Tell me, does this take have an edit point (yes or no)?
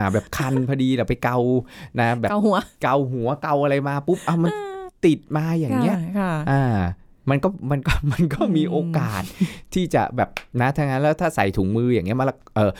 no